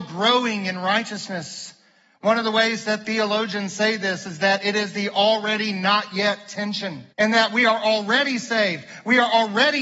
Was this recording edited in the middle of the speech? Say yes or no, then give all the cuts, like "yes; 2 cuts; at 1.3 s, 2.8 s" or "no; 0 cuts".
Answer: yes; 1 cut; at 7.1 s